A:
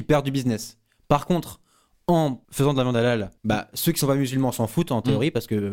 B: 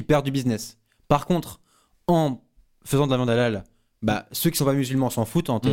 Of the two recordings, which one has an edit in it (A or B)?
A